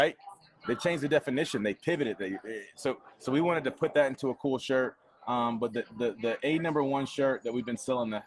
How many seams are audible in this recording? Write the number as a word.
zero